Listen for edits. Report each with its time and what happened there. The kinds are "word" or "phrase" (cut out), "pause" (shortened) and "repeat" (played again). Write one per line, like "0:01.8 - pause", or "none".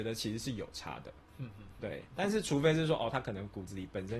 none